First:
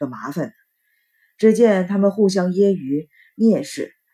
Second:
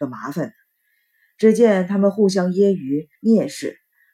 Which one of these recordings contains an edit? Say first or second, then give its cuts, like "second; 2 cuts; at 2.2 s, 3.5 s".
second; 1 cut; at 3.1 s